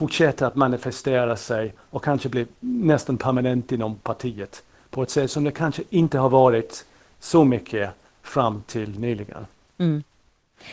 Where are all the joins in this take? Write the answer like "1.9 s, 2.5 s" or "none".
none